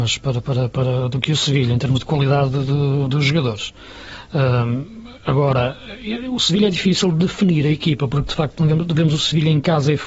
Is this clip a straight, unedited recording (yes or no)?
yes